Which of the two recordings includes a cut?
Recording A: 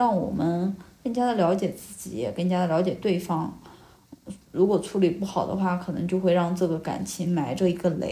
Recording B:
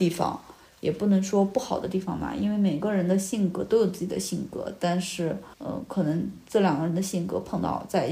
B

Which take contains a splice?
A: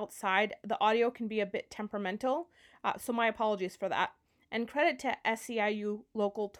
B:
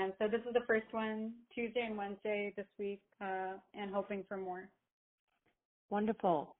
B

